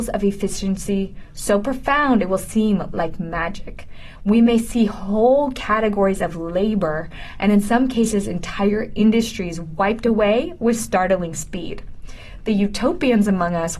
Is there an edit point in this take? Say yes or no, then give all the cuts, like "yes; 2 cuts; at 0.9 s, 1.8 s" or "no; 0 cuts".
no; 0 cuts